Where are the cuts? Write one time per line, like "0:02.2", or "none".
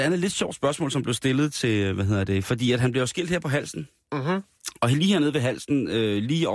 none